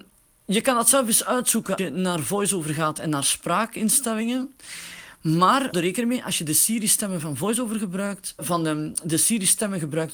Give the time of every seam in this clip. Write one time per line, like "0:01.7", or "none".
0:01.8
0:05.7
0:08.4